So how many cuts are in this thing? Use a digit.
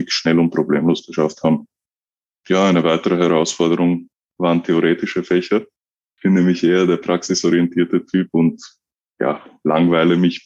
0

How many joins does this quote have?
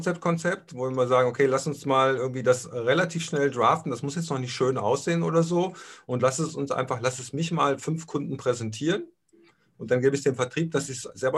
0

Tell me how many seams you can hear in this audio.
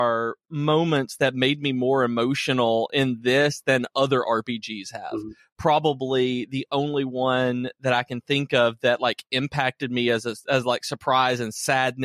0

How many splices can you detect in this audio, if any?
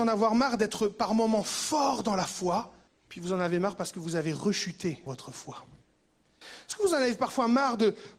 2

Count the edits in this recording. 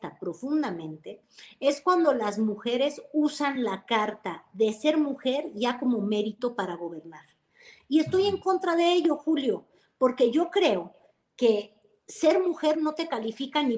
0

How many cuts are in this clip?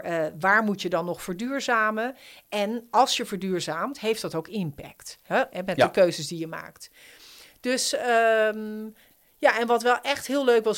0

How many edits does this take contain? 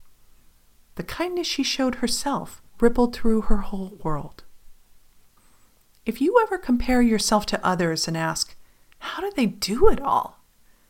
2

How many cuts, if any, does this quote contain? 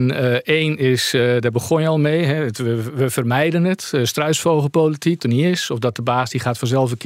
1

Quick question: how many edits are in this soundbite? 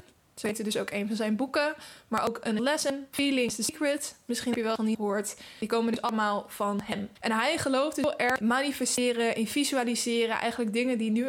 4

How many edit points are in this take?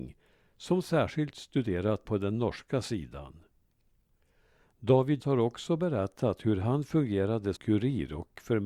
3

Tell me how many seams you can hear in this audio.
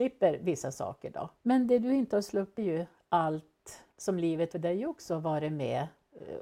4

